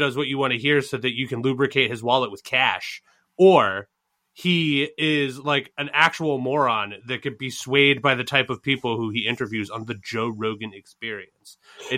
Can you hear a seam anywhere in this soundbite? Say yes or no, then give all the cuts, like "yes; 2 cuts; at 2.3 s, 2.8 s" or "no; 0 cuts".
no; 0 cuts